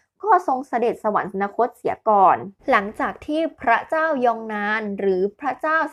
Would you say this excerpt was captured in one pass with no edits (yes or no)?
no